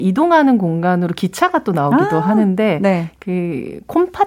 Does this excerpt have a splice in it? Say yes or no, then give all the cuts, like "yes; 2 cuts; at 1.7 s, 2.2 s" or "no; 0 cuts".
no; 0 cuts